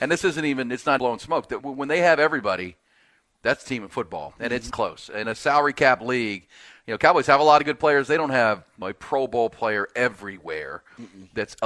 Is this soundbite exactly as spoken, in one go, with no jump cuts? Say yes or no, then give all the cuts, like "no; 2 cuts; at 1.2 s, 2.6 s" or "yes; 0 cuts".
no; 6 cuts; at 1.0 s, 1.6 s, 3.6 s, 4.7 s, 5.2 s, 8.8 s